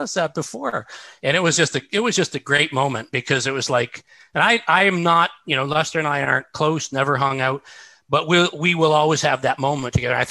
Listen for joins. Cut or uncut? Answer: uncut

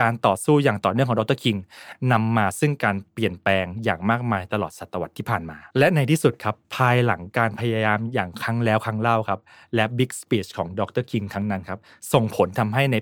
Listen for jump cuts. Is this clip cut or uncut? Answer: cut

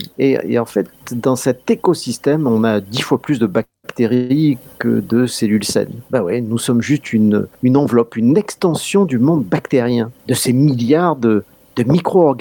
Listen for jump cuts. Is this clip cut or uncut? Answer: cut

